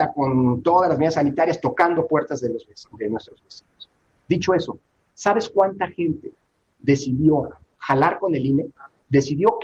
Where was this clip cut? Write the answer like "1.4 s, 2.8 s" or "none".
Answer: none